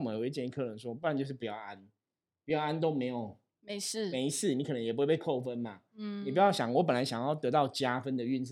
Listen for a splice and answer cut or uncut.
uncut